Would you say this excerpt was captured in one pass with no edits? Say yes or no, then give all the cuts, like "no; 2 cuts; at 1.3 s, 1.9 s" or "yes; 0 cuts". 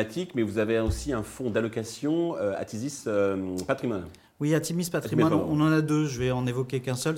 yes; 0 cuts